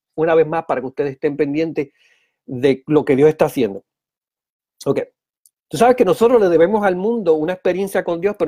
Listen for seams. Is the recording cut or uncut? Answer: uncut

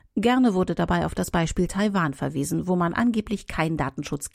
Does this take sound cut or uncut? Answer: uncut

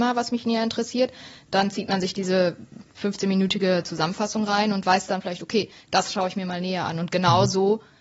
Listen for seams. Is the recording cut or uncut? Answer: uncut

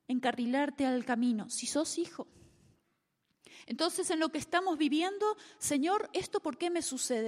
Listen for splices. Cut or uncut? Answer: uncut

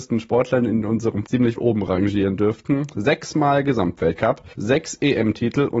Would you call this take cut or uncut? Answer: cut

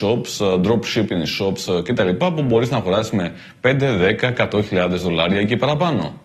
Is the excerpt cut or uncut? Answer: uncut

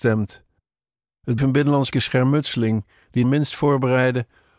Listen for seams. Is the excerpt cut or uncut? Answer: cut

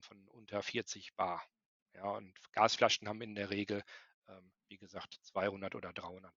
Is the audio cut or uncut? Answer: uncut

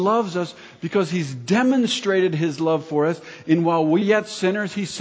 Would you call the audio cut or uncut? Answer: cut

